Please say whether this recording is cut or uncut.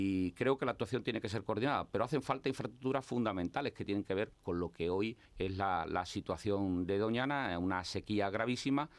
cut